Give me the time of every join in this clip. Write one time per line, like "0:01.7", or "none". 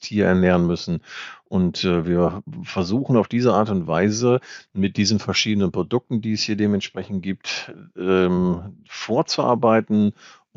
none